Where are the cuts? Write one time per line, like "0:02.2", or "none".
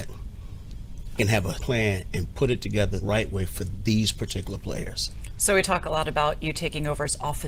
0:01.2
0:01.6
0:03.0